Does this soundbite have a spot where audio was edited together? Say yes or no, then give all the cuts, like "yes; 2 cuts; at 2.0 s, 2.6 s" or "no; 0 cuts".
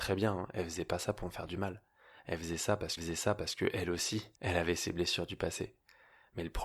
yes; 2 cuts; at 3.0 s, 4.4 s